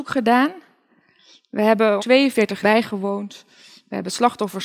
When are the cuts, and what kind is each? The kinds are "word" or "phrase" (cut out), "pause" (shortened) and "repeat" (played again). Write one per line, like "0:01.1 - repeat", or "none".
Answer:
0:02.0 - word
0:02.6 - word